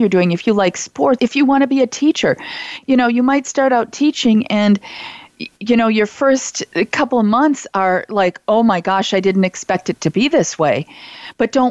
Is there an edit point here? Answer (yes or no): yes